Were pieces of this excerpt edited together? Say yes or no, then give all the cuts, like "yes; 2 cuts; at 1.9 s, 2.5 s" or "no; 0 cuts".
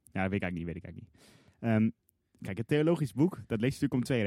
no; 0 cuts